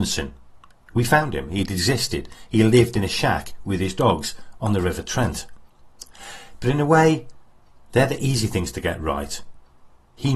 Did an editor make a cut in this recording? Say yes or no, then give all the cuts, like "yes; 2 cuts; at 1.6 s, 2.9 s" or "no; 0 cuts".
no; 0 cuts